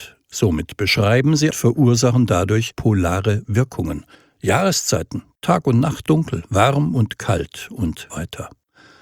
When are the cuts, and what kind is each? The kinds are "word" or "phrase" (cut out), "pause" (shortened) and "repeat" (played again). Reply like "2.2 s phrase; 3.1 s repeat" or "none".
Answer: 1.5 s phrase; 4.1 s pause; 6.1 s phrase; 8.1 s word